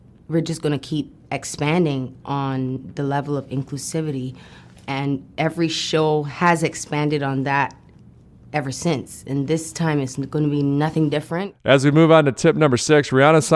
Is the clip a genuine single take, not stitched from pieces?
yes; 0 cuts

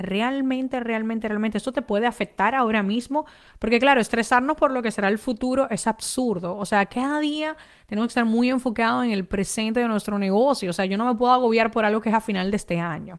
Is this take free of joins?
yes; 0 cuts

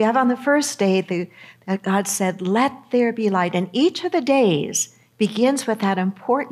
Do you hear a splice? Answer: no; 0 cuts

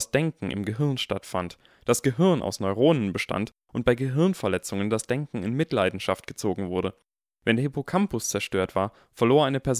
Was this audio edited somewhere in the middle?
no; 0 cuts

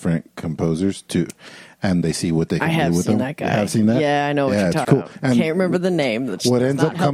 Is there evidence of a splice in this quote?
yes; 2 cuts; at 2.0 s, 4.8 s

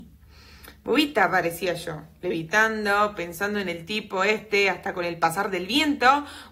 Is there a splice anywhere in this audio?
no; 0 cuts

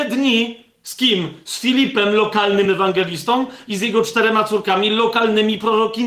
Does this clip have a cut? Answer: no; 0 cuts

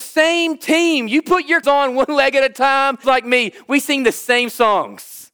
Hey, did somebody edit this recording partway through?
yes; 2 cuts; at 1.6 s, 3.0 s

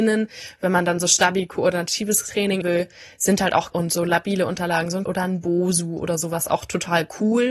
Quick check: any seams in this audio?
yes; 3 cuts; at 2.6 s, 3.7 s, 5.1 s

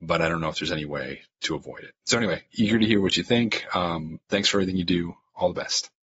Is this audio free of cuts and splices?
yes; 0 cuts

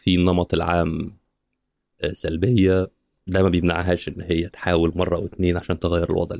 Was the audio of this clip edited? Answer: no; 0 cuts

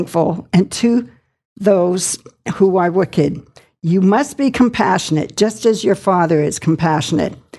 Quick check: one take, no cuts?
yes; 0 cuts

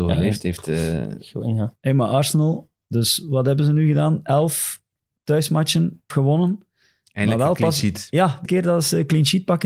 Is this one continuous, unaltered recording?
no; 2 cuts; at 6.1 s, 8.4 s

